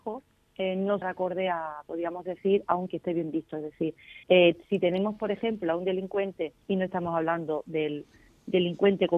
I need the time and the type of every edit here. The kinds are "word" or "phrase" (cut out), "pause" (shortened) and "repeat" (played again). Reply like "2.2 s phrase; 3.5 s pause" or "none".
1.0 s phrase; 2.9 s phrase; 4.2 s pause; 6.6 s pause